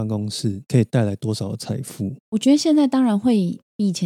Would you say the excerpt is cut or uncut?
cut